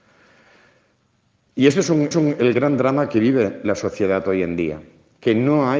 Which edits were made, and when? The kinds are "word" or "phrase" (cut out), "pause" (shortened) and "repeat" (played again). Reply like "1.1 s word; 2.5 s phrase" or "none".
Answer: 2.1 s repeat

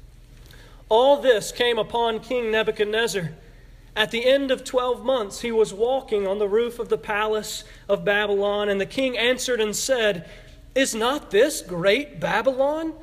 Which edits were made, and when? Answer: none

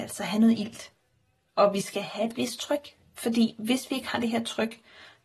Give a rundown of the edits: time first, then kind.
none

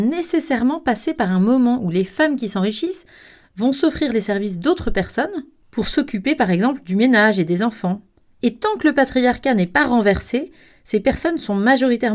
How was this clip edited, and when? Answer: none

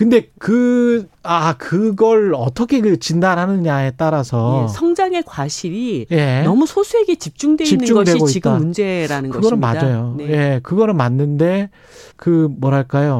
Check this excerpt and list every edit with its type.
1.1 s pause; 12.1 s pause

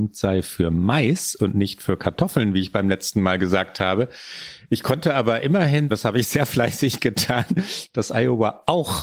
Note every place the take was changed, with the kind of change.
5.9 s word

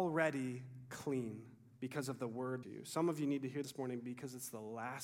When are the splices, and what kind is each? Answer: 2.6 s phrase; 3.6 s word

